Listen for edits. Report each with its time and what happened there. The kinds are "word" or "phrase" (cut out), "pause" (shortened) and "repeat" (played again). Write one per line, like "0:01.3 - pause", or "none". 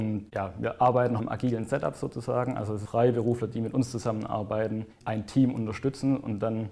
0:01.2 - phrase
0:02.9 - phrase
0:05.0 - word